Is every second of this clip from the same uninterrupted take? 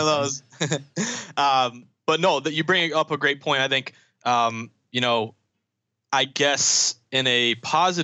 yes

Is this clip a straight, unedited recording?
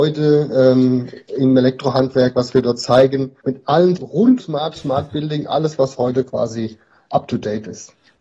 no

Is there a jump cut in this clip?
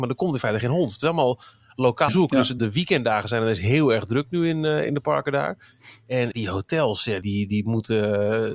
yes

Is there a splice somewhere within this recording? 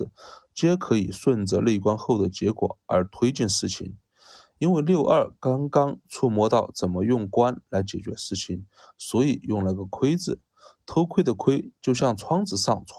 no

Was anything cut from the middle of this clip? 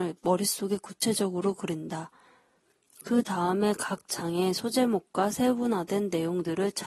no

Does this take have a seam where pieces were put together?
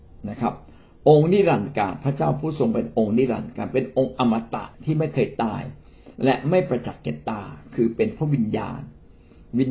yes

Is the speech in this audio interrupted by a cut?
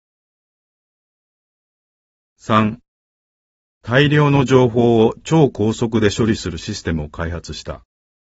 no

